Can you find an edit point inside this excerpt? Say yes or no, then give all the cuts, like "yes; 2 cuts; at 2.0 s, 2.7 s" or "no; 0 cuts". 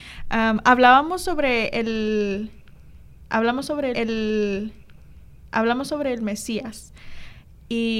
yes; 1 cut; at 3.9 s